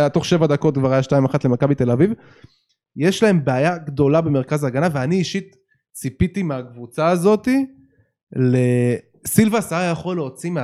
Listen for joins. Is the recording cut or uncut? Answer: uncut